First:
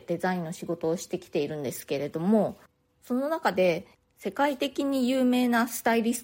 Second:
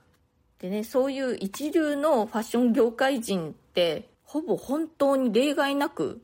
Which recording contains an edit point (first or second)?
second